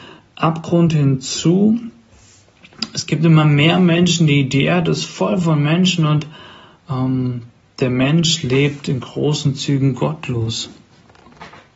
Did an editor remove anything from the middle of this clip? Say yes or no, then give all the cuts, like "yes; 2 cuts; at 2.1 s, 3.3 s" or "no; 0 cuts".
no; 0 cuts